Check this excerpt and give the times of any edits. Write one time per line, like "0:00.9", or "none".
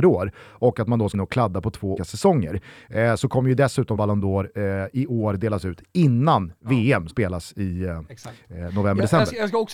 0:01.1
0:02.0
0:04.0
0:07.1